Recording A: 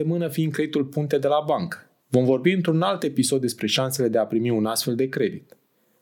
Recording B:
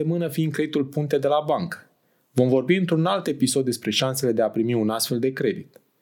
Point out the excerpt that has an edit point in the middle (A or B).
A